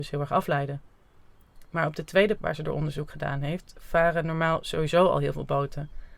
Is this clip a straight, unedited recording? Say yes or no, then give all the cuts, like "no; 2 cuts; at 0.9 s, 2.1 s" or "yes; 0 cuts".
no; 1 cut; at 2.4 s